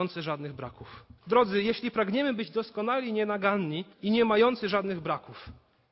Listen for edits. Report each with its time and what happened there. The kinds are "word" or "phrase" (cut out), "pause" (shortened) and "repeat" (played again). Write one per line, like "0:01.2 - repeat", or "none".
0:01.2 - pause
0:03.9 - pause

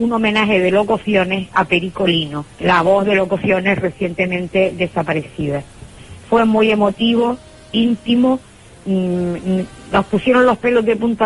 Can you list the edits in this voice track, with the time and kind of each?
0:02.5 - pause

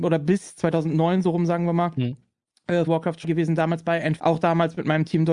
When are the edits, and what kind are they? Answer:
0:02.9 - word
0:03.2 - word
0:04.2 - word

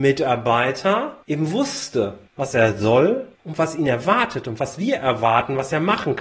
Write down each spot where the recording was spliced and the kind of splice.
0:01.2 - pause
0:02.3 - pause
0:03.3 - pause

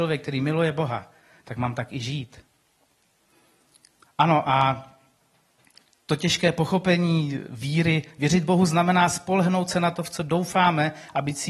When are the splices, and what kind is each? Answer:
none

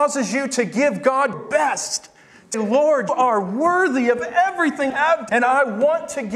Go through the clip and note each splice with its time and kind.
0:01.3 - word
0:02.5 - word
0:03.1 - word
0:04.9 - word
0:05.3 - word

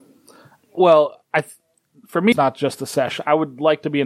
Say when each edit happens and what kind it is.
0:02.3 - word

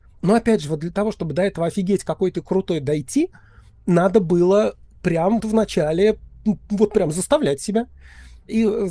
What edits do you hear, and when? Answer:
0:05.4 - word

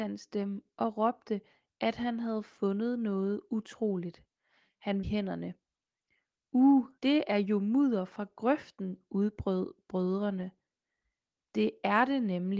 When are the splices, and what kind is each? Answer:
0:05.0 - phrase
0:07.0 - pause

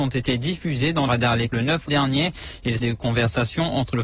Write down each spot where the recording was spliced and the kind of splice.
0:01.1 - word
0:01.5 - word
0:01.9 - word
0:02.8 - word

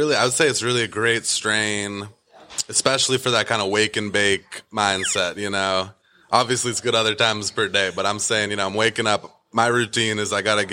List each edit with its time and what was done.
none

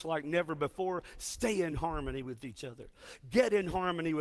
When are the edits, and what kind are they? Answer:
none

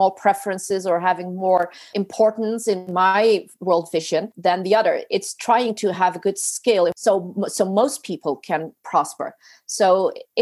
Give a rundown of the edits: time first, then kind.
none

